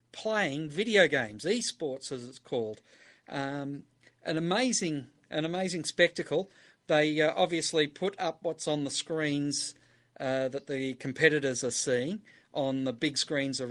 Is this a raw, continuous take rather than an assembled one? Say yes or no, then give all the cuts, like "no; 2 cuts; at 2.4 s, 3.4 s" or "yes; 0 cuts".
yes; 0 cuts